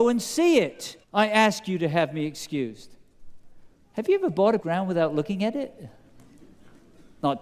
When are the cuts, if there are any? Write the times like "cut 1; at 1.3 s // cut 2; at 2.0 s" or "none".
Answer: cut 1; at 1.0 s // cut 2; at 4.6 s